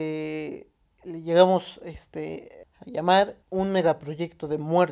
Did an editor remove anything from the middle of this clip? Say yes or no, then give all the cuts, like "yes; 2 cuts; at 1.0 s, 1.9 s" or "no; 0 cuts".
yes; 2 cuts; at 2.6 s, 3.4 s